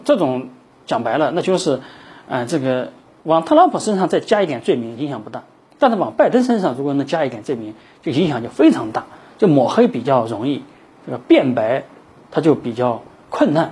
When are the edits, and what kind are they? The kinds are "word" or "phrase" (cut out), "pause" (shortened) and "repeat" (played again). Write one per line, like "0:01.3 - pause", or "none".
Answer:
none